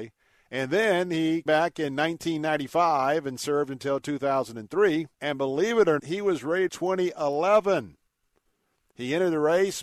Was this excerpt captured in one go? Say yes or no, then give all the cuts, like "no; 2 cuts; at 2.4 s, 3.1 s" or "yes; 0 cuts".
no; 4 cuts; at 1.5 s, 5.1 s, 6.0 s, 6.7 s